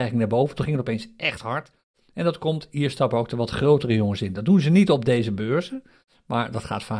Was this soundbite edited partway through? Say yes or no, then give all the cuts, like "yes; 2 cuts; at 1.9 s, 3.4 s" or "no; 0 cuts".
no; 0 cuts